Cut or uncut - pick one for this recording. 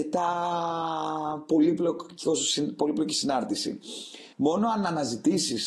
cut